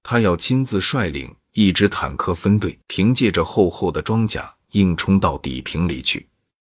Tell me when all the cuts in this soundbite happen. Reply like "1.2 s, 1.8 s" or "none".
2.8 s